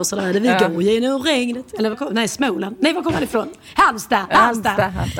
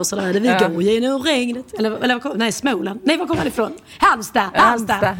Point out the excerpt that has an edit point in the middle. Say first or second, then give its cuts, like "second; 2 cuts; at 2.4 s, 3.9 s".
first; 1 cut; at 1.9 s